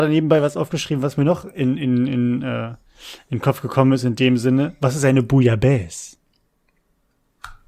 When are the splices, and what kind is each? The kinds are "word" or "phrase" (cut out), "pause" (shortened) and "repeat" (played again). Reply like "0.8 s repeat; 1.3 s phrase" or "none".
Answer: none